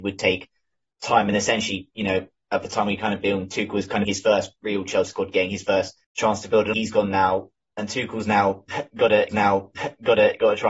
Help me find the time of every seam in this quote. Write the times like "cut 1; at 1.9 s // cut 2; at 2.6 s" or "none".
cut 1; at 4.0 s // cut 2; at 6.0 s // cut 3; at 6.7 s // cut 4; at 9.3 s